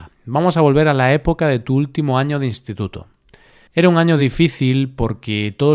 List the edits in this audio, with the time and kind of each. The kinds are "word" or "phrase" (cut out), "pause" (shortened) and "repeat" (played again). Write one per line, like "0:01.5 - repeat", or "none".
none

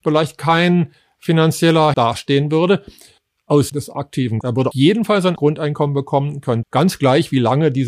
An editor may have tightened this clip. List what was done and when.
0:01.9 - word
0:03.7 - word
0:04.4 - word
0:04.7 - word
0:05.4 - word
0:06.6 - word

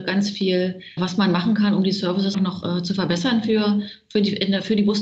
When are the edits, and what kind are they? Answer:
0:01.0 - word
0:02.3 - word

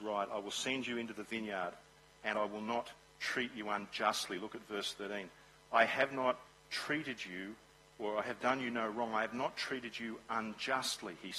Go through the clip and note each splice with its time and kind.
none

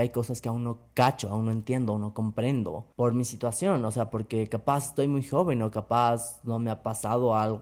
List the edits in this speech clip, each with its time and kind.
0:02.9 - pause

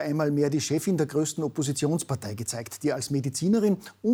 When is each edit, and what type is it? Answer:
none

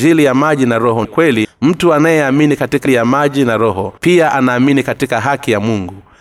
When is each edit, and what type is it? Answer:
0:01.0 - word
0:01.4 - word
0:02.9 - word
0:04.0 - pause

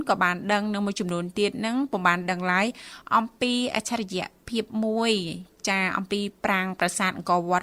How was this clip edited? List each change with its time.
none

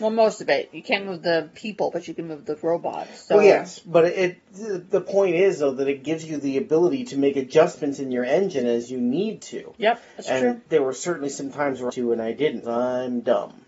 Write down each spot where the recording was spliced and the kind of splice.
0:10.7 - pause
0:11.9 - phrase
0:12.6 - word

